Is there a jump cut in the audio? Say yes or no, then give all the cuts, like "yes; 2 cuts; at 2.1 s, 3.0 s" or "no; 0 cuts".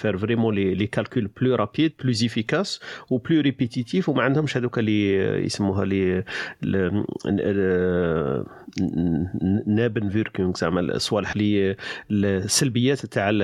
yes; 1 cut; at 11.3 s